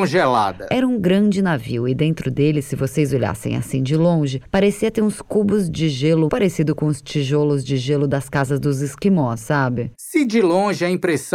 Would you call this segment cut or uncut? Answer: cut